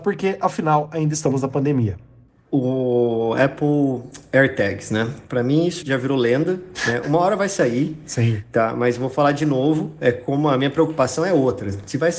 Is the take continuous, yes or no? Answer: no